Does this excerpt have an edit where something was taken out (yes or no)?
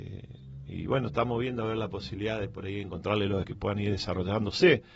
yes